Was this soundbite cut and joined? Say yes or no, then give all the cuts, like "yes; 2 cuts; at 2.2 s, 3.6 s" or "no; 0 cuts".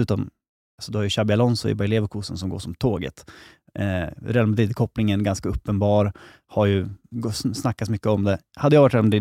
no; 0 cuts